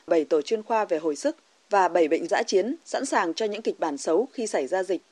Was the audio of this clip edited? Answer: yes; 1 cut; at 2.3 s

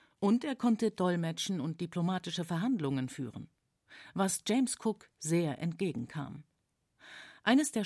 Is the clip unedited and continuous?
yes; 0 cuts

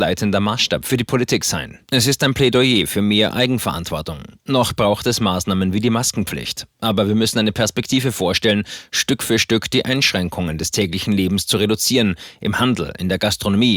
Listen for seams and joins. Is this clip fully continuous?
no; 1 cut; at 1.9 s

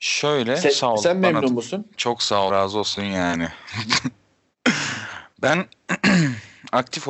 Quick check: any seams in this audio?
yes; 2 cuts; at 2.5 s, 3.0 s

